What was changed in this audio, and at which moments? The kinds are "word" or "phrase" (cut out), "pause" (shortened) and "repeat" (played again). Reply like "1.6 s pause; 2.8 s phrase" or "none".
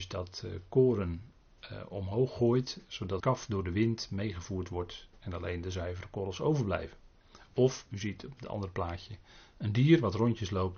3.2 s word